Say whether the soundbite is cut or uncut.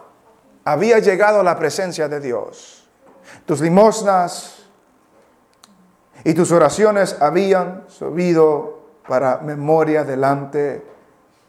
uncut